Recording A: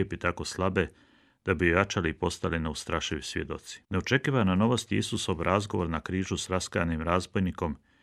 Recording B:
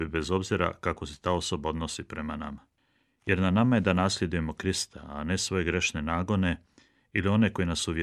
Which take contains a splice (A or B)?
A